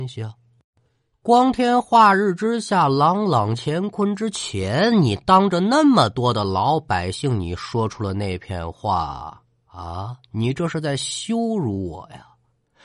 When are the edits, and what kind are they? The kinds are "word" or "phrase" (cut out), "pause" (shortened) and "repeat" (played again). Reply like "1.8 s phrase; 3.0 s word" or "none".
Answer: 10.2 s pause